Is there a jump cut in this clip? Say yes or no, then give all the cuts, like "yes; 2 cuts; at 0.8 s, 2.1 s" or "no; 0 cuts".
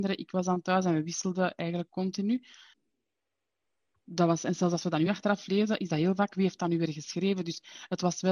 no; 0 cuts